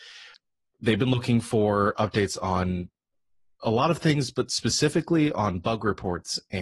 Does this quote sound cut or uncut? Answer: uncut